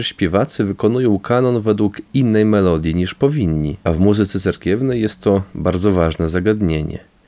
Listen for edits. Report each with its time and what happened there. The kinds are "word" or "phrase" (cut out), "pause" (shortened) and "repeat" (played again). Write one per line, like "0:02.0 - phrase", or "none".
0:03.8 - pause